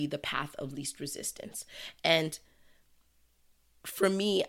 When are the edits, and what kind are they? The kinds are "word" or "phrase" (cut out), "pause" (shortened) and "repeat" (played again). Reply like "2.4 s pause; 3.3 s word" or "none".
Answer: none